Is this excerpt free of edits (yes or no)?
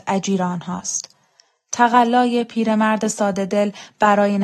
yes